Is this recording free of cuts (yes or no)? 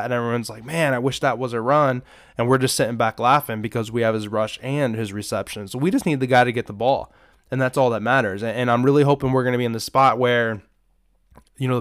yes